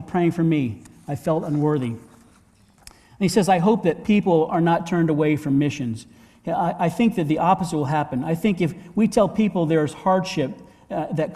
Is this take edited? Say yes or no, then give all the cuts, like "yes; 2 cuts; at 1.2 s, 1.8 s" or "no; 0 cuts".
no; 0 cuts